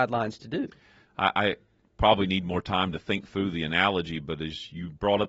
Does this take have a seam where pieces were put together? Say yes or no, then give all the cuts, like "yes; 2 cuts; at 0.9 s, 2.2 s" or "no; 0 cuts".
no; 0 cuts